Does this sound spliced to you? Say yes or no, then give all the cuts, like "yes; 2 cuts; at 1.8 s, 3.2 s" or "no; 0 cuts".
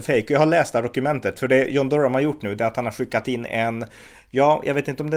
no; 0 cuts